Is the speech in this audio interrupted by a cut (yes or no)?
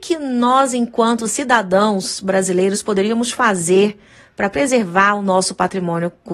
no